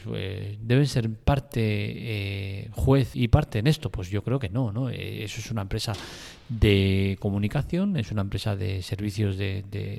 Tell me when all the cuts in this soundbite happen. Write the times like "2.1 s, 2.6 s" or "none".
1.2 s, 3.1 s